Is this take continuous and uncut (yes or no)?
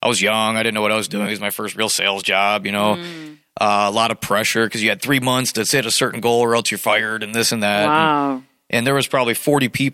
yes